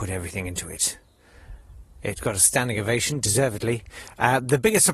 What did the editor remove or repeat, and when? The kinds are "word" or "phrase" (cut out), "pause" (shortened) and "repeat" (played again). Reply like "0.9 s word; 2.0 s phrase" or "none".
none